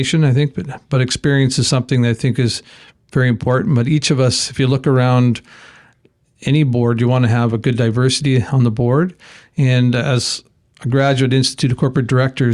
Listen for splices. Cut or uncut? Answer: uncut